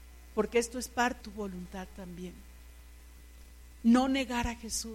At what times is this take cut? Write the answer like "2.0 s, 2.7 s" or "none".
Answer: 1.2 s